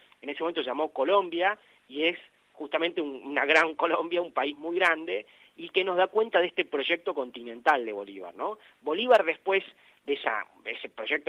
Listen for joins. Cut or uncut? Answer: uncut